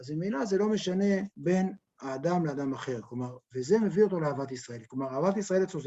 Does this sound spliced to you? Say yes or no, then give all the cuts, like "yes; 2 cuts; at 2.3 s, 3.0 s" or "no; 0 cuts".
yes; 1 cut; at 1.3 s